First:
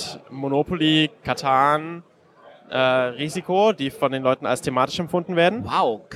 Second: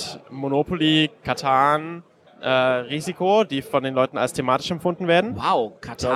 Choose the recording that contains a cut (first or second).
second